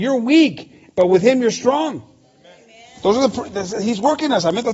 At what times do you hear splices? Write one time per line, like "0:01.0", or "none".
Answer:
none